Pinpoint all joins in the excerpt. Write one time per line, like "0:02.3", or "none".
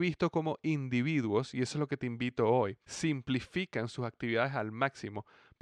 0:02.8